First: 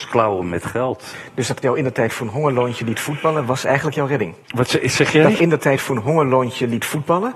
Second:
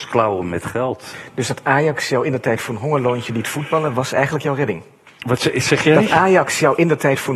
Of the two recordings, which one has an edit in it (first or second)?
first